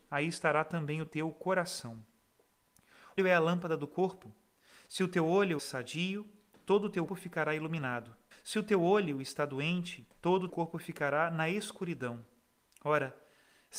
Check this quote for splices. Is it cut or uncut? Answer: cut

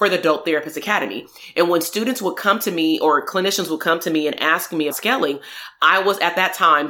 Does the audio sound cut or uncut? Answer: cut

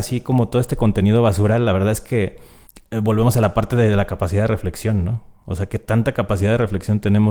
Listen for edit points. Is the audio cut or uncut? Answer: cut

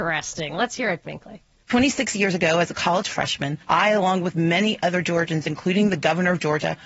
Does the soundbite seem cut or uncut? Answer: cut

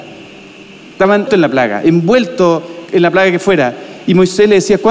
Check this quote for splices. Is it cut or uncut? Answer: cut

